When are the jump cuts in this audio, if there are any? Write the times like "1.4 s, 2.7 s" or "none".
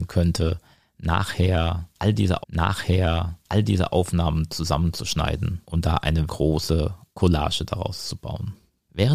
2.4 s, 5.6 s, 6.3 s